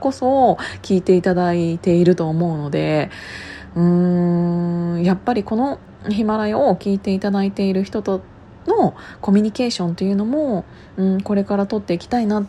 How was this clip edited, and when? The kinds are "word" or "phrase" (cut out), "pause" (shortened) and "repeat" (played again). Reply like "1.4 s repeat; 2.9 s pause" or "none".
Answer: none